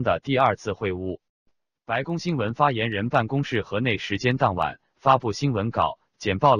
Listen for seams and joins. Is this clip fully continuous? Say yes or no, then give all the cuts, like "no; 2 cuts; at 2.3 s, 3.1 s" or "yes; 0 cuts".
yes; 0 cuts